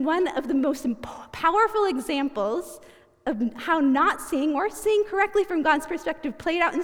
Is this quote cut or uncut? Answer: uncut